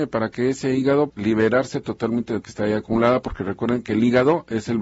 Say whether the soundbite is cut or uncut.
cut